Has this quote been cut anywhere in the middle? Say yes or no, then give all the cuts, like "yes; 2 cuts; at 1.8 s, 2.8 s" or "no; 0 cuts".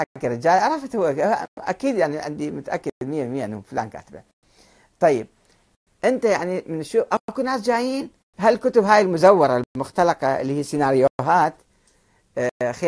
yes; 1 cut; at 8.2 s